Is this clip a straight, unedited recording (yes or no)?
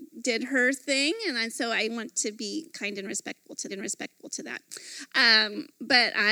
no